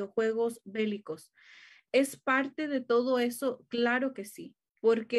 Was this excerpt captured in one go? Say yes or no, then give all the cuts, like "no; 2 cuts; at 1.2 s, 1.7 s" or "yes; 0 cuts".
yes; 0 cuts